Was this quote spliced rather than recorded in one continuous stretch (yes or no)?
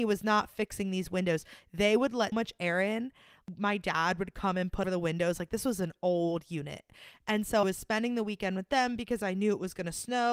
yes